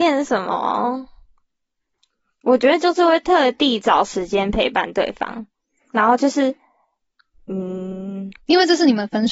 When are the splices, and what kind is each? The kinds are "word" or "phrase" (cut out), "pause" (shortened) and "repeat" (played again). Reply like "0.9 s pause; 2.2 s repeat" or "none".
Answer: none

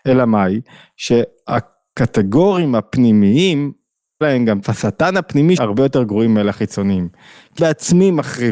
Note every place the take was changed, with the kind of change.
4.2 s word; 4.6 s word; 5.6 s word; 7.6 s word

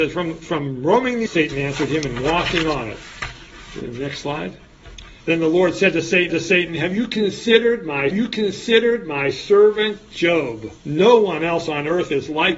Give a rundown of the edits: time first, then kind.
1.3 s word; 5.2 s pause; 6.3 s repeat; 8.1 s repeat; 10.8 s pause

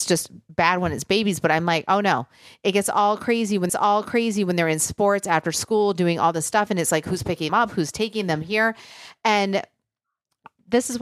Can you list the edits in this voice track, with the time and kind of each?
3.7 s repeat; 7.5 s word

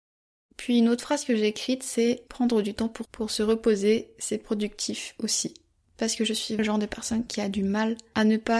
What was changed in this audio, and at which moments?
3.0 s word; 6.6 s word

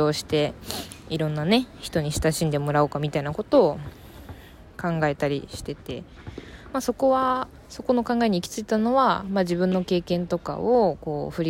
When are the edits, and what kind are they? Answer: 7.6 s pause

